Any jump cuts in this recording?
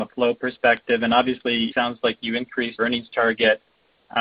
yes; 2 cuts; at 1.7 s, 2.8 s

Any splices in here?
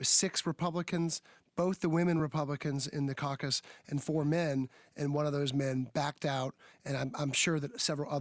no; 0 cuts

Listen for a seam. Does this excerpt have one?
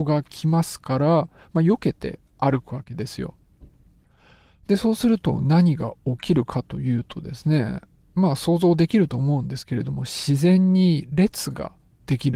no; 0 cuts

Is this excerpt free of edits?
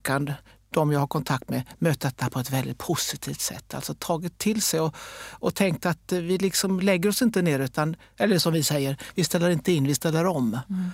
yes; 0 cuts

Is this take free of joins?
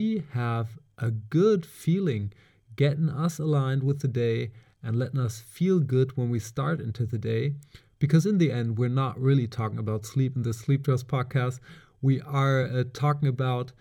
yes; 0 cuts

